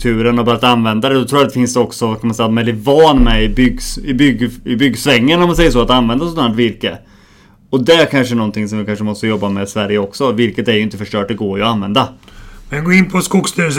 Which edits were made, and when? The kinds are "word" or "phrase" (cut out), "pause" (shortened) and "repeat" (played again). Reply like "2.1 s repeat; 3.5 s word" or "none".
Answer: none